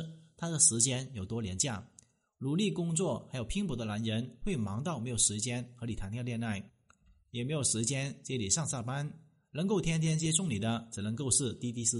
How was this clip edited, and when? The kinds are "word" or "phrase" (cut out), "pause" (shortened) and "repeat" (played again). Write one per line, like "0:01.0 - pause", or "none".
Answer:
none